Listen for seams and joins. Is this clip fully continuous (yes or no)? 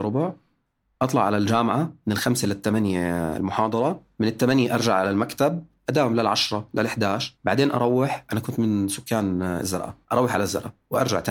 no